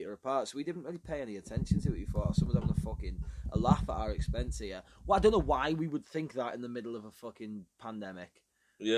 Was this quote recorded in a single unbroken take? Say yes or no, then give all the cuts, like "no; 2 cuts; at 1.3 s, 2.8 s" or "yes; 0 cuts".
yes; 0 cuts